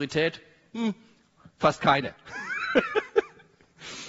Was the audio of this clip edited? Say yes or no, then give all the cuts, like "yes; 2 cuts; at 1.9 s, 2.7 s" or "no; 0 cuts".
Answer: no; 0 cuts